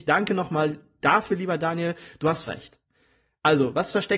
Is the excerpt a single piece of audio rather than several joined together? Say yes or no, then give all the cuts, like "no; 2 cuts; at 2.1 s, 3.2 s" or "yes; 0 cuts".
no; 1 cut; at 2.5 s